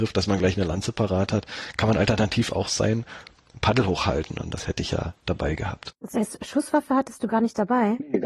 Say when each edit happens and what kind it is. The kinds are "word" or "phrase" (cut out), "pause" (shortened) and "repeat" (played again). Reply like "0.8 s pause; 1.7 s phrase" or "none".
5.2 s pause

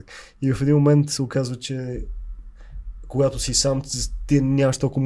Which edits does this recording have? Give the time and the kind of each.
none

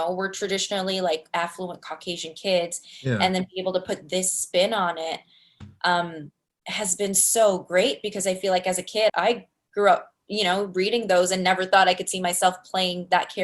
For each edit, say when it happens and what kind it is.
9.1 s word

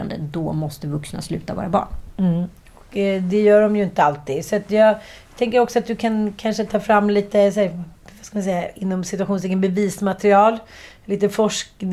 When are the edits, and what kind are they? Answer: none

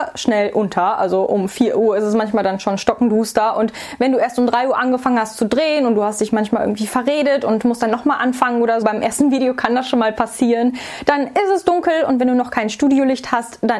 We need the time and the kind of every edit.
8.8 s word

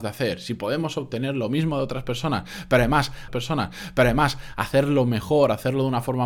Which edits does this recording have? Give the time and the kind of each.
3.3 s repeat

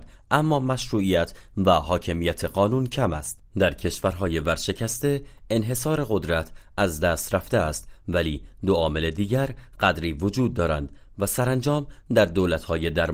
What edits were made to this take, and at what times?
3.5 s pause

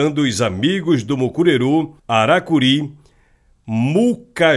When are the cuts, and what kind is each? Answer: 2.0 s pause

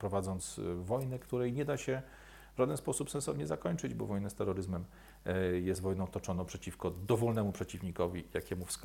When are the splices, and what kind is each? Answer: none

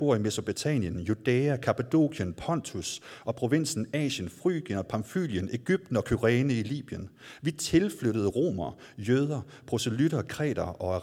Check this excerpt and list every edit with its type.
none

